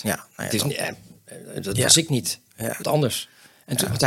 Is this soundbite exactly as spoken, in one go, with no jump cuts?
no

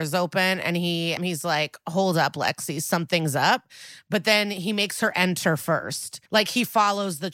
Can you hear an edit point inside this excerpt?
yes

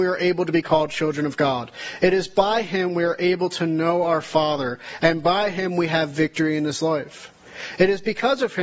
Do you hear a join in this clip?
no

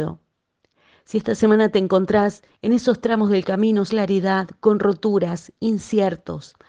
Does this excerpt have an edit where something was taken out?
yes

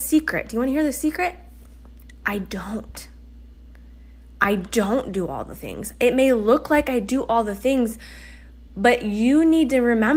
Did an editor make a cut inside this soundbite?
no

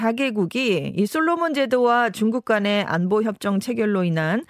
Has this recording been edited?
no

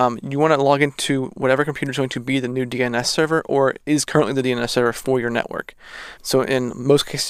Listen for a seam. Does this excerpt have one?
yes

